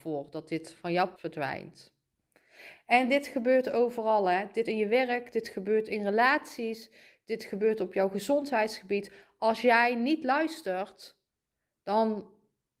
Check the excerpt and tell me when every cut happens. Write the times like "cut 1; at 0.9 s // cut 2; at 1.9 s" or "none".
cut 1; at 1.2 s // cut 2; at 4.6 s